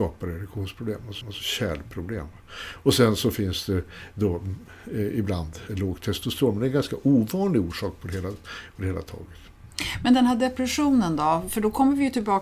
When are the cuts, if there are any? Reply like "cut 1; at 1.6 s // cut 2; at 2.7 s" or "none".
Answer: cut 1; at 1.2 s // cut 2; at 5.7 s